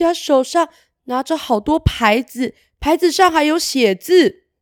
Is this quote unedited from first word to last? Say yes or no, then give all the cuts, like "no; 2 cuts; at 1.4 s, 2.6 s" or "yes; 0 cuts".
yes; 0 cuts